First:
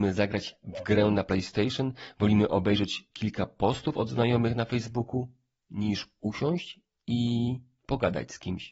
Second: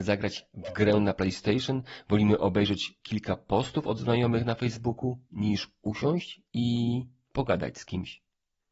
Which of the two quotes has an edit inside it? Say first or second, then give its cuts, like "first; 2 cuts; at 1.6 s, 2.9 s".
second; 2 cuts; at 5.2 s, 6.5 s